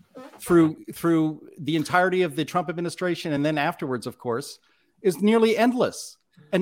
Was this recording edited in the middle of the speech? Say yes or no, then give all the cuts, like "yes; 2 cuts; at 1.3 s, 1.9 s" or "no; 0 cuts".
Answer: no; 0 cuts